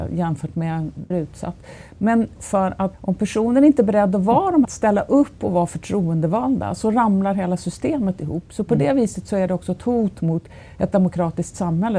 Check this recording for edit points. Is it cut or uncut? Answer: cut